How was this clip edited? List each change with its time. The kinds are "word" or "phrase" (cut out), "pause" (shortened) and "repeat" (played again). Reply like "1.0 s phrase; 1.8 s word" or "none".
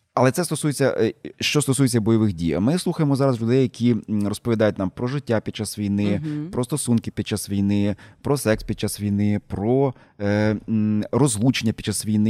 none